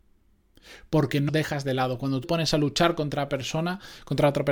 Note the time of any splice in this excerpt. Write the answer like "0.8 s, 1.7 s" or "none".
1.3 s, 2.2 s